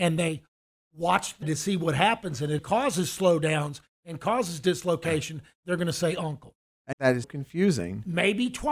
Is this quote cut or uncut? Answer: cut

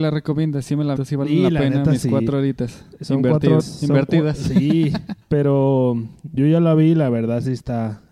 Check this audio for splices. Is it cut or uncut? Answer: cut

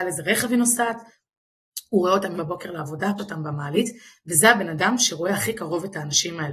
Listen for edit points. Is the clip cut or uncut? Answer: cut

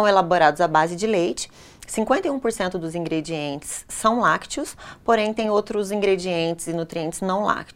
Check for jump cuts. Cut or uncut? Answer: uncut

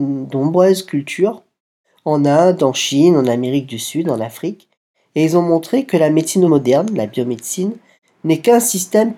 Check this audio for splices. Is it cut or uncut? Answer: cut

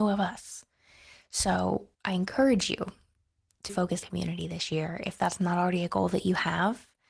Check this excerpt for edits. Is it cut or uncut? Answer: cut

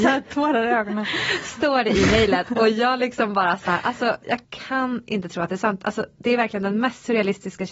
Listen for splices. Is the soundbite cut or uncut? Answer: cut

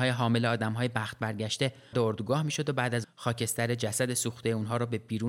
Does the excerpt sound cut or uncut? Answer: cut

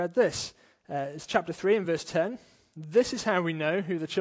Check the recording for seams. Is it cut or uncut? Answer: uncut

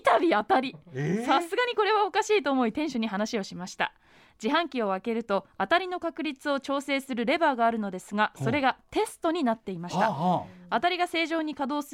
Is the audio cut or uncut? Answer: uncut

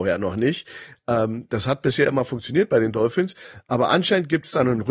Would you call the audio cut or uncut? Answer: uncut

